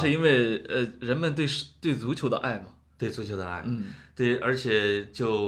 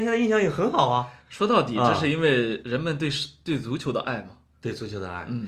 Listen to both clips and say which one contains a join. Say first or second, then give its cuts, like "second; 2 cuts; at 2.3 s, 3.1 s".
second; 1 cut; at 2.6 s